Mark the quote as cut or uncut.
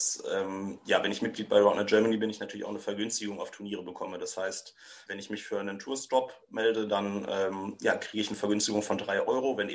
cut